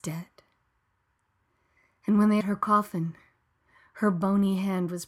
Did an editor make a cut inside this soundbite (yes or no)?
yes